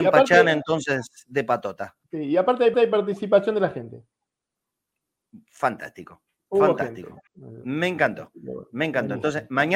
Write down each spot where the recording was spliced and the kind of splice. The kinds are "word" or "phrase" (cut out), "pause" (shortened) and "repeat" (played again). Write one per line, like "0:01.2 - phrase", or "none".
0:02.0 - pause
0:02.7 - repeat
0:07.3 - pause